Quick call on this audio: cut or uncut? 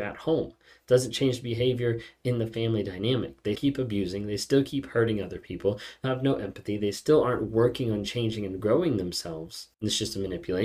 cut